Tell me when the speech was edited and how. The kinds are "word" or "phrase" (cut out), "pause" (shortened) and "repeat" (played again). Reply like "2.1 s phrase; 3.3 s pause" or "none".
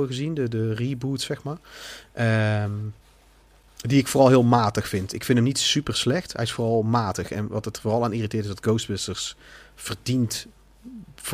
none